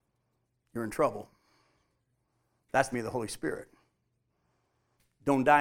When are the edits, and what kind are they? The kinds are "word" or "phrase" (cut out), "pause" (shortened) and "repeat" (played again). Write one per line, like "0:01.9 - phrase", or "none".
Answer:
0:02.9 - word